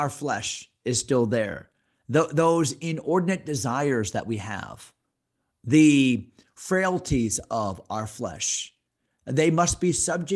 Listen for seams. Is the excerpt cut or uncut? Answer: uncut